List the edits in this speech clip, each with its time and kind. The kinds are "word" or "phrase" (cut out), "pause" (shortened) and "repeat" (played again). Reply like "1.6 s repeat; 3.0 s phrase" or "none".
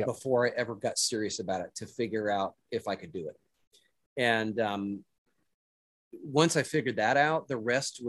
none